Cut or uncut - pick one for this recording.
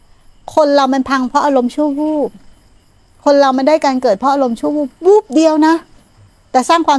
uncut